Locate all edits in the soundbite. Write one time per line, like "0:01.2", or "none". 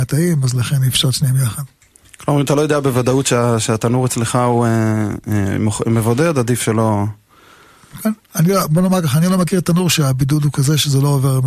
none